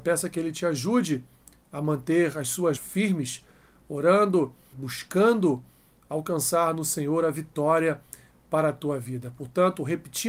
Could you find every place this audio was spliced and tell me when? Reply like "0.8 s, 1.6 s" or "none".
2.8 s, 4.7 s